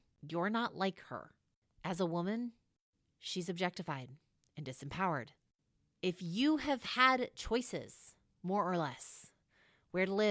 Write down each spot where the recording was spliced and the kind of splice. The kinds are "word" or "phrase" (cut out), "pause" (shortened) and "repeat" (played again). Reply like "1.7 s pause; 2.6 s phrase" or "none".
none